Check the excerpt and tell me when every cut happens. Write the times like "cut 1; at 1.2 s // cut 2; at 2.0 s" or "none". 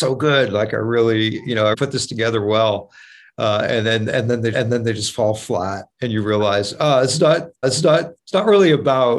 cut 1; at 1.7 s // cut 2; at 4.5 s // cut 3; at 5.9 s // cut 4; at 7.6 s